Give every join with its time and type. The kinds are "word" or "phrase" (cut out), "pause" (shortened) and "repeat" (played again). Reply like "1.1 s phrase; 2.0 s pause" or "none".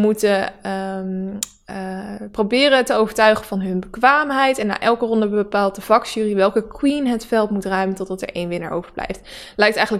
none